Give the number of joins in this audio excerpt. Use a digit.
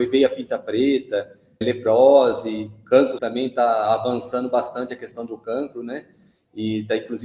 2